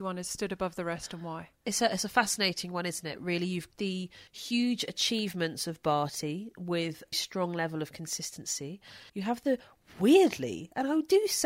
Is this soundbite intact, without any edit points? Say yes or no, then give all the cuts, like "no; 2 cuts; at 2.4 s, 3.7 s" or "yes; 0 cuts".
no; 5 cuts; at 1.6 s, 3.7 s, 4.3 s, 7.1 s, 9.1 s